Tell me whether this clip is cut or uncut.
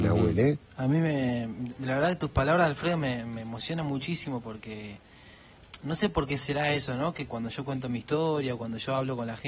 uncut